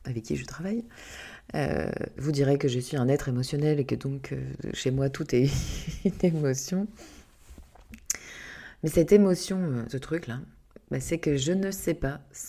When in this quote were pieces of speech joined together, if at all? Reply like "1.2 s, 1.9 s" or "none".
9.9 s